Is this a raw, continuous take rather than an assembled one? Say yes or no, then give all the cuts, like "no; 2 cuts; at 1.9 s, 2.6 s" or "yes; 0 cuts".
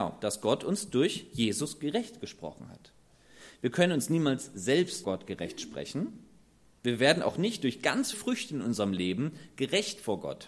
no; 2 cuts; at 5.0 s, 8.1 s